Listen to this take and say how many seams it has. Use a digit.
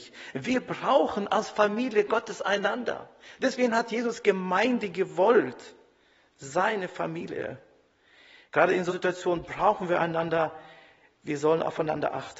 1